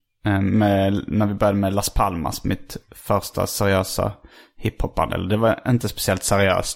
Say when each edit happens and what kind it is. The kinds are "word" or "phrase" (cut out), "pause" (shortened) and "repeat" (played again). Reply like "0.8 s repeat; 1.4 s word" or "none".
none